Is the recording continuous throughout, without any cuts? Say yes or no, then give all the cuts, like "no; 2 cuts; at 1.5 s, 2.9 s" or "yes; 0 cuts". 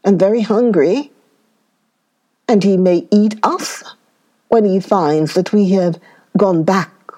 yes; 0 cuts